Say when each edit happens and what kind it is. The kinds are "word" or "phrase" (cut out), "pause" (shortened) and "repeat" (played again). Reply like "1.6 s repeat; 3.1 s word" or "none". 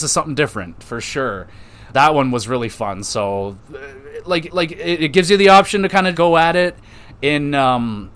1.9 s word; 4.5 s repeat; 6.1 s word

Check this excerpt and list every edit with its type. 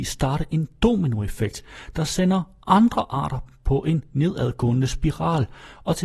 none

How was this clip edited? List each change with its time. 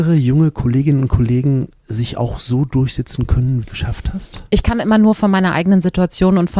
1.8 s pause; 3.6 s phrase

